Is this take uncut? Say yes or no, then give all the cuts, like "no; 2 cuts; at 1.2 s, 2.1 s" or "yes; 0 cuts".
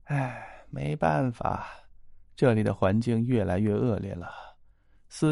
yes; 0 cuts